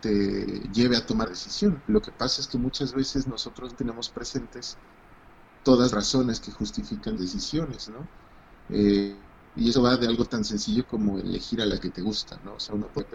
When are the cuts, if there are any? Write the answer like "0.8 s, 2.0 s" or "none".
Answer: 1.3 s, 3.7 s, 5.9 s, 7.2 s, 9.6 s, 11.8 s